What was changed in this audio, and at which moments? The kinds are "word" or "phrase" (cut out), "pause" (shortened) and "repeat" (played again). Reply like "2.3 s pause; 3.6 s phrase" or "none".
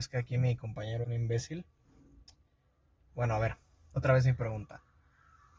1.0 s word; 4.0 s word